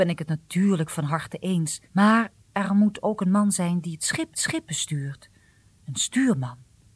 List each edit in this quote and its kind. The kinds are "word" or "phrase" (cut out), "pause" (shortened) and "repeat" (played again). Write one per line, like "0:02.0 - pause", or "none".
0:01.8 - pause
0:04.3 - repeat